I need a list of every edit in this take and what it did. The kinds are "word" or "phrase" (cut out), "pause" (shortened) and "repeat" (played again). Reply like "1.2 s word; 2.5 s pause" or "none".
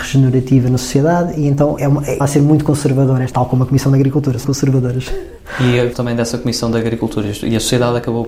1.8 s word; 2.2 s word; 3.3 s word; 4.4 s word; 5.9 s word